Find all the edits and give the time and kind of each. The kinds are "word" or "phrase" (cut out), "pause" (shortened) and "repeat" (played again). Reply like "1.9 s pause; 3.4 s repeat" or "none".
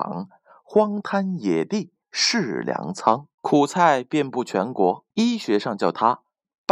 2.0 s pause; 3.4 s pause; 5.1 s pause